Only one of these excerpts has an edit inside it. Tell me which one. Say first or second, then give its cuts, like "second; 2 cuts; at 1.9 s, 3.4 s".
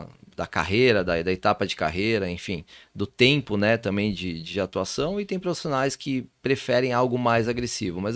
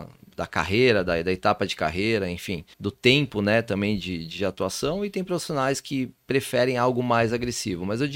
second; 1 cut; at 2.7 s